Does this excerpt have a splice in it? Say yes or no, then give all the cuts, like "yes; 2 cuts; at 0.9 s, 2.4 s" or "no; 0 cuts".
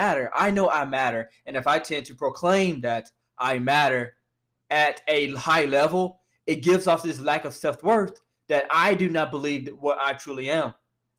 no; 0 cuts